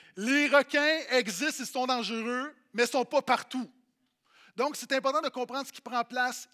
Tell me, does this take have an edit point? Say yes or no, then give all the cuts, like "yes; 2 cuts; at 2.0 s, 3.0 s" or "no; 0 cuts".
no; 0 cuts